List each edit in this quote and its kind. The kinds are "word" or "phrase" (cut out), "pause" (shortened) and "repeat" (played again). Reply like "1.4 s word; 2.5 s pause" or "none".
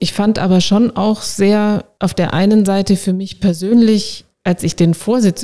4.3 s pause

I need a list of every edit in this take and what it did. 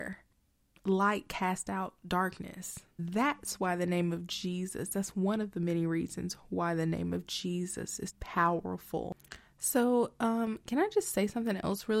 2.9 s pause; 8.1 s word

